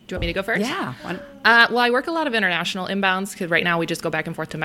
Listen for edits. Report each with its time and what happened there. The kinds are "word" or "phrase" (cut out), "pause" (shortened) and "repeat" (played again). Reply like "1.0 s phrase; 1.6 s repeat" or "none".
none